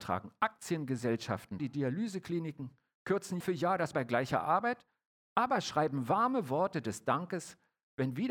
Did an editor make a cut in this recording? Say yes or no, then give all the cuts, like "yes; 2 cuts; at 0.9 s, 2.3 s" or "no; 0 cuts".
yes; 3 cuts; at 1.6 s, 3.4 s, 3.9 s